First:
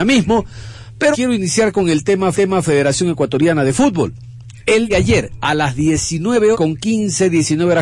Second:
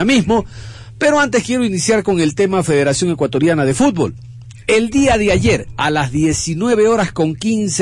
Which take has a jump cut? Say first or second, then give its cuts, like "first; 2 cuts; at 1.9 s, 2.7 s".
first; 4 cuts; at 1.1 s, 2.3 s, 4.9 s, 6.5 s